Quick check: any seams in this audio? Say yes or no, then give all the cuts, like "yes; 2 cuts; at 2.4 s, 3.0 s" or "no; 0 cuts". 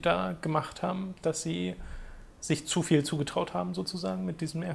yes; 1 cut; at 2.3 s